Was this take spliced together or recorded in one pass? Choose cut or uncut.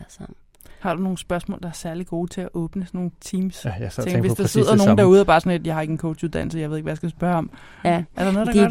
uncut